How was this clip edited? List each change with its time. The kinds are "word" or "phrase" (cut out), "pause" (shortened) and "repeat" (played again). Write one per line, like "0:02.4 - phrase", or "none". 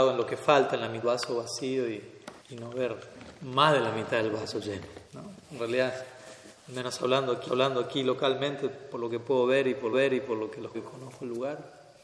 0:01.0 - word
0:02.4 - pause
0:05.1 - pause
0:06.6 - pause
0:07.5 - repeat
0:09.9 - repeat
0:10.7 - word